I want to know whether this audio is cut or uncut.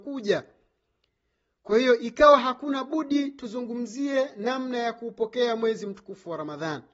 uncut